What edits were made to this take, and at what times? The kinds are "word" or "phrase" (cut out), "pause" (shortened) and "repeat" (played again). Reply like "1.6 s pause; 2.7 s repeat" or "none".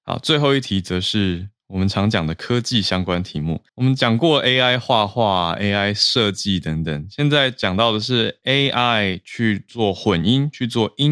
3.7 s pause